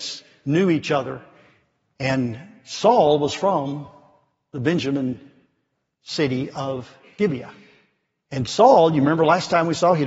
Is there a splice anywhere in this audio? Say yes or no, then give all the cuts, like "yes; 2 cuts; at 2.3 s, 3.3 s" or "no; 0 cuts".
no; 0 cuts